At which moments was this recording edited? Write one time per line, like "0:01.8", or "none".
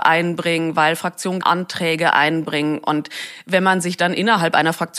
0:01.4